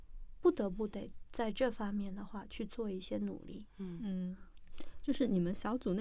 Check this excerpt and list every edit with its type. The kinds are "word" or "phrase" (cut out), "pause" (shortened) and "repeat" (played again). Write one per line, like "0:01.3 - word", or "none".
none